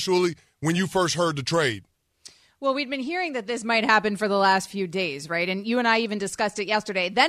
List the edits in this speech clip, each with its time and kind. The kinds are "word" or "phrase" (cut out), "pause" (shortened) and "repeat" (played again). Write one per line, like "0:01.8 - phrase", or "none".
none